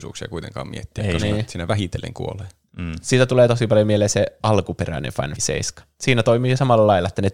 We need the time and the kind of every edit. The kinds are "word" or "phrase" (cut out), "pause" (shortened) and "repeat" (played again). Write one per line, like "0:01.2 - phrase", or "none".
0:05.4 - word